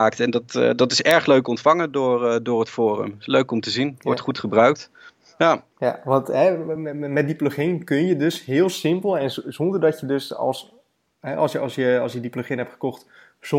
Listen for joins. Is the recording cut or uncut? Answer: uncut